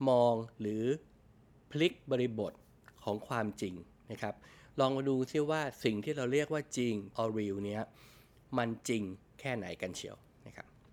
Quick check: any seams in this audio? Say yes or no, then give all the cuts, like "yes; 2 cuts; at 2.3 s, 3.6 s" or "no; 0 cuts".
yes; 1 cut; at 7.1 s